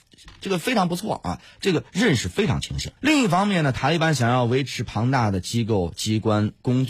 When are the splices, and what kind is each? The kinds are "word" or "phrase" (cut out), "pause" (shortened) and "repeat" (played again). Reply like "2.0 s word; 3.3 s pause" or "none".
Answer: 3.0 s pause